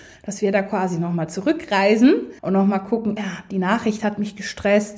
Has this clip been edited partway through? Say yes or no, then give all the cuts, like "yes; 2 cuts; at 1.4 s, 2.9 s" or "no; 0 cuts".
yes; 2 cuts; at 2.4 s, 3.2 s